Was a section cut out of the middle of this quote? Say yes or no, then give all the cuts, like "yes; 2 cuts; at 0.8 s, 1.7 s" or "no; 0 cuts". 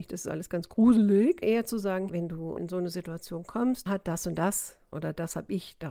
yes; 5 cuts; at 1.4 s, 2.1 s, 2.6 s, 3.9 s, 4.9 s